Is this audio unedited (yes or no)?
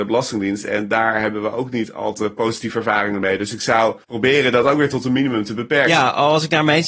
no